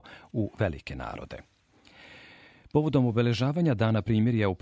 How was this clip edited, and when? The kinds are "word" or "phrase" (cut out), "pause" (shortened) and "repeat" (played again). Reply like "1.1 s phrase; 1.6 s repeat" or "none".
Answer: none